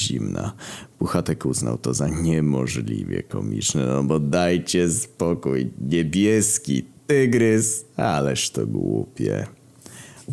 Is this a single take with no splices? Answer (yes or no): yes